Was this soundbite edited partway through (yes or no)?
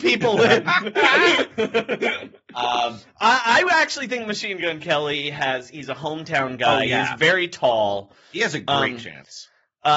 no